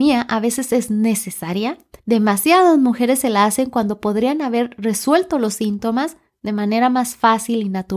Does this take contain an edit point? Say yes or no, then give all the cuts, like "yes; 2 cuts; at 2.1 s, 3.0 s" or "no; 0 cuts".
yes; 1 cut; at 2.0 s